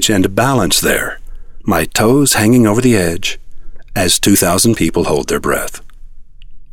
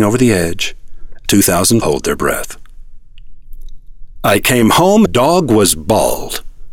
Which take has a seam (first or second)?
second